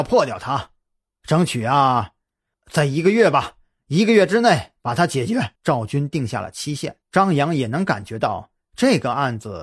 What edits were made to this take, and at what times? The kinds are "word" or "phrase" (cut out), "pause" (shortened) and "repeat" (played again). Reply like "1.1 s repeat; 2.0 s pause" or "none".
2.5 s word; 5.6 s pause; 7.0 s pause